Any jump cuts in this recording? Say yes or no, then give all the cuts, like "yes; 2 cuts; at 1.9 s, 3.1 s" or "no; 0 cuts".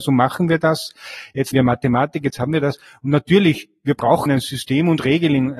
yes; 2 cuts; at 1.5 s, 4.3 s